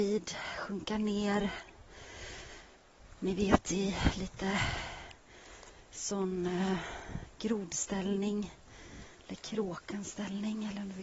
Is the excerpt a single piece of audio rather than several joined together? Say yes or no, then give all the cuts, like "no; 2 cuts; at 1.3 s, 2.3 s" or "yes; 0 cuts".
yes; 0 cuts